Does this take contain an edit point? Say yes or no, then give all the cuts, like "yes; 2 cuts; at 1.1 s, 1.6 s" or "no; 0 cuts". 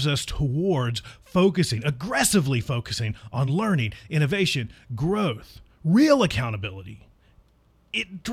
no; 0 cuts